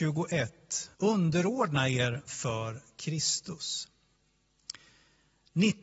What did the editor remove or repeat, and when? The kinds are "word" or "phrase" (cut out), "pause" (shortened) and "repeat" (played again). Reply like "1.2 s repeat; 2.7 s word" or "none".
0.9 s pause; 2.3 s phrase